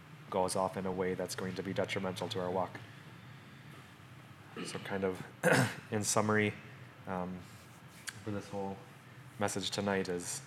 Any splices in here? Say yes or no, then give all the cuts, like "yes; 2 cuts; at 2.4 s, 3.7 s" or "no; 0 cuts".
no; 0 cuts